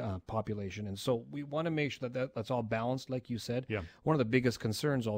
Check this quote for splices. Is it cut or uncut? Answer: uncut